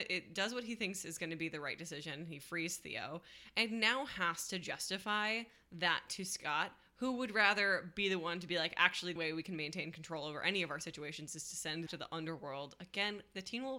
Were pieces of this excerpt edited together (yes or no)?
yes